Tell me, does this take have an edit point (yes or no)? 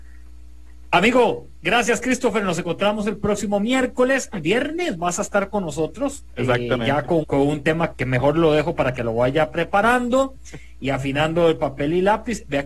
yes